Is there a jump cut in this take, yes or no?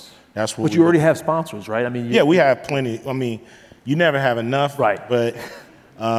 no